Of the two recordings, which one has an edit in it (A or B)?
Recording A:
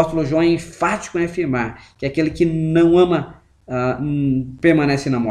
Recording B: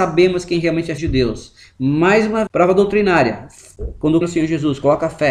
B